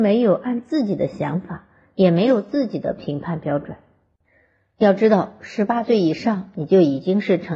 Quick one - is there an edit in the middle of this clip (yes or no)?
no